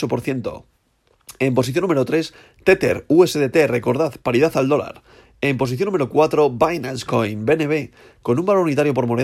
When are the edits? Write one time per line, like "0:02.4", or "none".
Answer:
none

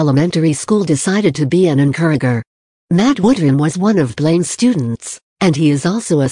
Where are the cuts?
none

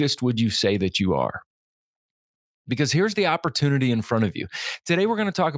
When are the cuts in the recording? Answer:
none

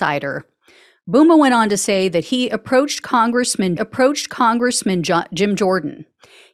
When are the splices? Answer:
0:03.8

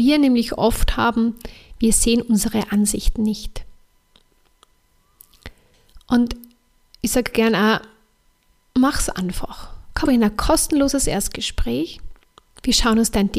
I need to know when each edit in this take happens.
0:10.1

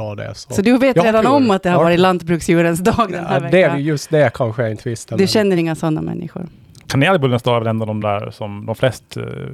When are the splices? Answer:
none

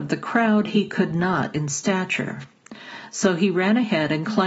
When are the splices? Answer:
0:01.5

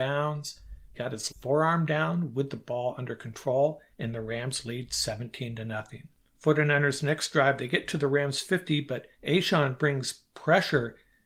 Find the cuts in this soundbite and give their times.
0:00.9
0:01.3
0:03.9
0:06.1
0:09.1

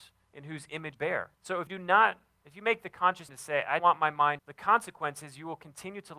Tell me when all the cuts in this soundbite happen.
0:00.9
0:01.3
0:01.7
0:02.4
0:03.3
0:03.8
0:04.4

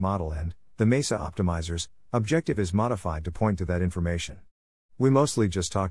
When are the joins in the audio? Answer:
none

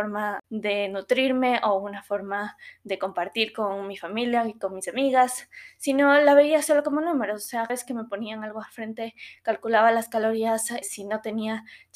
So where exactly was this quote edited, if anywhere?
0:07.7
0:10.8

